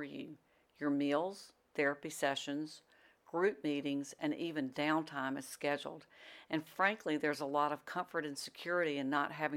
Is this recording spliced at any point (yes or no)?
no